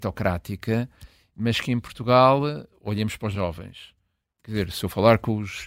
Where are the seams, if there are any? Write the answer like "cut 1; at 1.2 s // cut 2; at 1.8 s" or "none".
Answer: cut 1; at 3.3 s